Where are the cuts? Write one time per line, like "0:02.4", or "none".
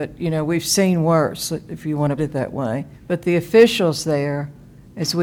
0:02.2
0:02.9